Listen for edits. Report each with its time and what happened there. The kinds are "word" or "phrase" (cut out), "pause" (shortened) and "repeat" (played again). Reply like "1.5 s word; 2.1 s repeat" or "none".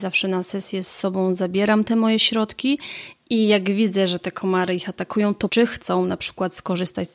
5.5 s word

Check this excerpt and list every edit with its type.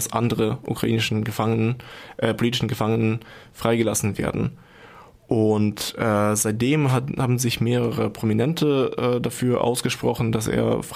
none

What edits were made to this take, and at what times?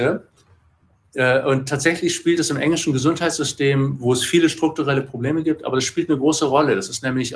none

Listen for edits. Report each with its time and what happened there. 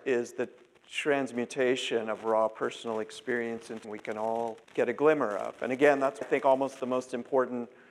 3.8 s word; 4.6 s pause; 6.2 s word

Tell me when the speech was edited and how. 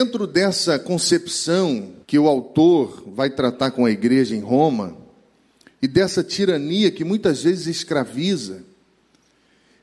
2.0 s pause

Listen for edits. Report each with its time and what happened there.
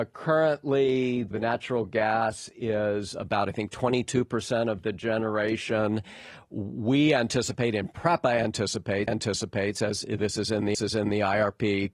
1.3 s word; 9.1 s repeat; 10.7 s repeat

